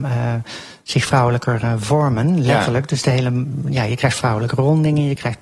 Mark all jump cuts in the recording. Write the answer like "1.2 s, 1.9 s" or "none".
none